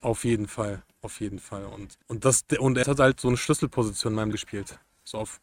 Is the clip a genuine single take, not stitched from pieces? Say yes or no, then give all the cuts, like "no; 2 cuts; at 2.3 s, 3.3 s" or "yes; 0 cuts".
no; 3 cuts; at 2.0 s, 2.8 s, 4.3 s